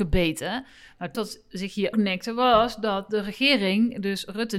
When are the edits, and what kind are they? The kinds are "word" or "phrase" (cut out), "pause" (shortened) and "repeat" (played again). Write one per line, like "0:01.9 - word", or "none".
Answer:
0:01.1 - word
0:01.9 - word